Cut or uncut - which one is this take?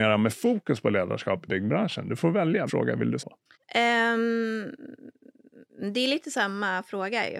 cut